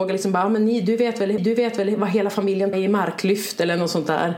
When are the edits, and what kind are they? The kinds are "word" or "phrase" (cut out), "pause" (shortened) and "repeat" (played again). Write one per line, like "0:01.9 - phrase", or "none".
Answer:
0:01.4 - repeat
0:02.7 - word